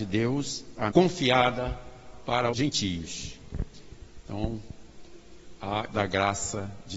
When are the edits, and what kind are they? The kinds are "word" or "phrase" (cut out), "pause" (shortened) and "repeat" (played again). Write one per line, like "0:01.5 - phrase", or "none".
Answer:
0:00.9 - word
0:02.5 - word
0:05.9 - word